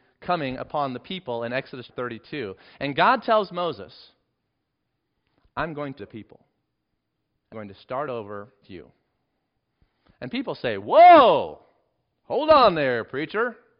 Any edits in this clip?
yes; 4 cuts; at 1.9 s, 6.0 s, 7.5 s, 8.6 s

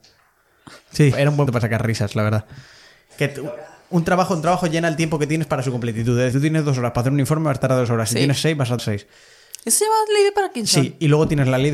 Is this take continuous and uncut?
no; 4 cuts; at 1.1 s, 1.5 s, 6.3 s, 8.8 s

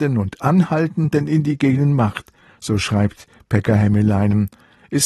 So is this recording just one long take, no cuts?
yes; 0 cuts

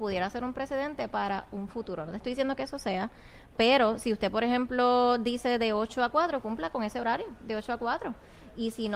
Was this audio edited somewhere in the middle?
no; 0 cuts

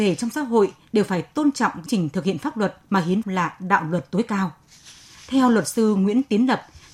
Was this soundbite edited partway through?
yes; 2 cuts; at 1.9 s, 3.2 s

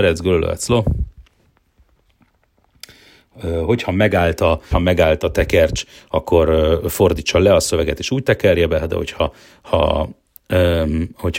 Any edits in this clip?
yes; 1 cut; at 4.7 s

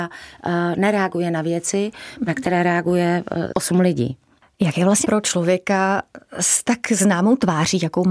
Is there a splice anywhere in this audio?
yes; 2 cuts; at 3.5 s, 5.0 s

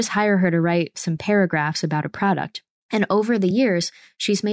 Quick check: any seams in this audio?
no; 0 cuts

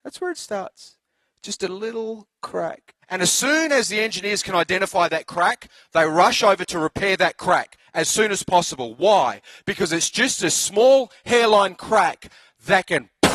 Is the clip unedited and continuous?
no; 1 cut; at 3.0 s

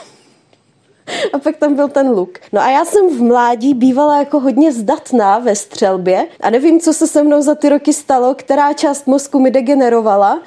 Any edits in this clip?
yes; 2 cuts; at 2.5 s, 6.3 s

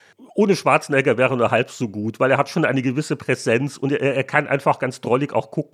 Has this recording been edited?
no; 0 cuts

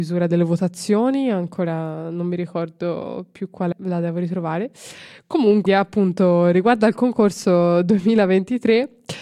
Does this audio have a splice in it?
yes; 2 cuts; at 3.7 s, 5.7 s

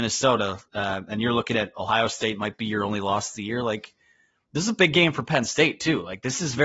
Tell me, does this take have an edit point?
no; 0 cuts

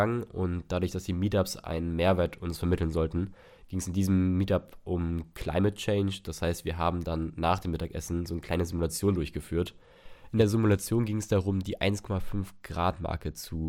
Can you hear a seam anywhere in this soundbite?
no; 0 cuts

